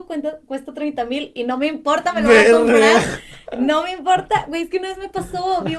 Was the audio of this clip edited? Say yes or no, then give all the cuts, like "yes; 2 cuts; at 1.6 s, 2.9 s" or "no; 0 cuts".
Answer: no; 0 cuts